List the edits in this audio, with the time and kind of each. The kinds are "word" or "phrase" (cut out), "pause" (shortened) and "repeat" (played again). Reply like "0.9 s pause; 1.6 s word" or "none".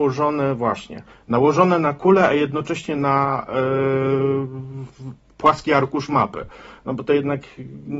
none